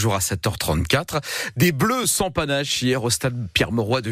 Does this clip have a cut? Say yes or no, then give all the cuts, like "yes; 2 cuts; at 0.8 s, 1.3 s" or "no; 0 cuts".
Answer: no; 0 cuts